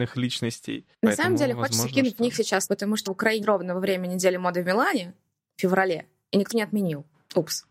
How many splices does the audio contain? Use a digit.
4